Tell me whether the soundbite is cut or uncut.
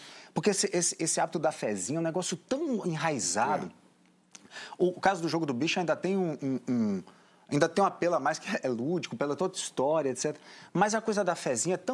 uncut